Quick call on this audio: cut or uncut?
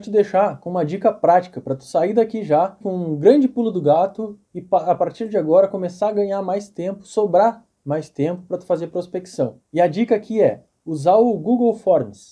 uncut